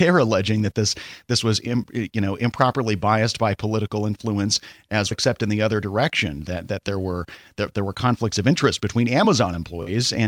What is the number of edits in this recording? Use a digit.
1